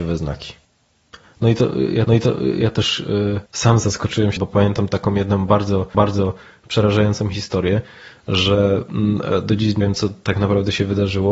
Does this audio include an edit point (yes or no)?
yes